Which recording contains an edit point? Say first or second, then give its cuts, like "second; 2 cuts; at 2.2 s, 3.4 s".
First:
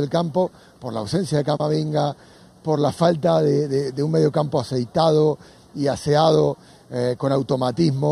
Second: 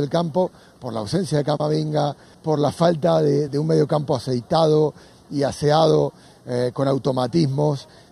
second; 2 cuts; at 2.3 s, 3.5 s